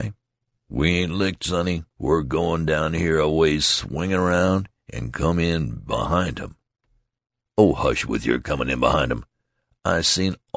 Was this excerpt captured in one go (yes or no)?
no